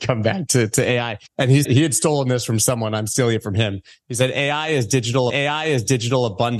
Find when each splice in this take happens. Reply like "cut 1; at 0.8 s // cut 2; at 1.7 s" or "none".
cut 1; at 1.3 s // cut 2; at 1.6 s // cut 3; at 5.3 s